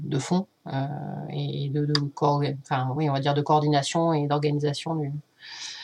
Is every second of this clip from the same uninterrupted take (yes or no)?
yes